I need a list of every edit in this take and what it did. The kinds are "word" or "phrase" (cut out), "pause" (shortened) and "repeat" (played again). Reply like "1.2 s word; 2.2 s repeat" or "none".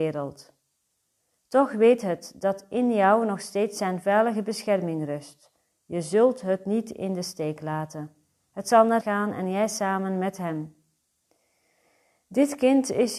9.0 s word

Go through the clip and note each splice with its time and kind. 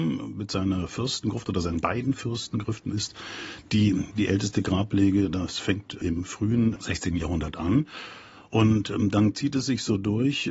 none

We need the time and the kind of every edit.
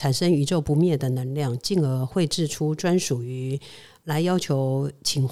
none

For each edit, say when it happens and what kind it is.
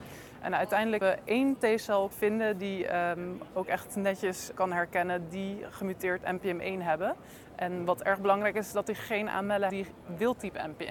1.0 s word; 2.1 s word; 4.5 s word; 9.7 s word

